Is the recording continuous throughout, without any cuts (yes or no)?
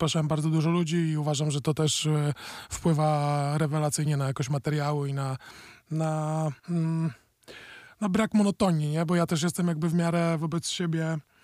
no